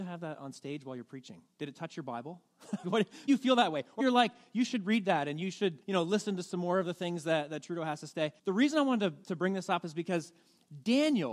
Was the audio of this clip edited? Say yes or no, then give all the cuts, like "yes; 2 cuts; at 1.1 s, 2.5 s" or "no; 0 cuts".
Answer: yes; 6 cuts; at 1.5 s, 2.8 s, 3.3 s, 4.0 s, 5.8 s, 8.4 s